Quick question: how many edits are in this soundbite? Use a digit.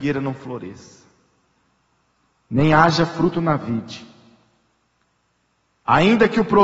0